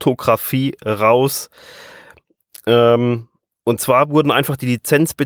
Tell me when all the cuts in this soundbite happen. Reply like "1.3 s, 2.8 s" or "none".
none